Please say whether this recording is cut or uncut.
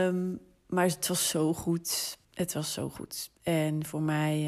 cut